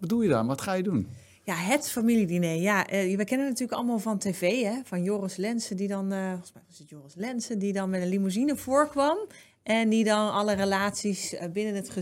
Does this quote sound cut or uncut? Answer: uncut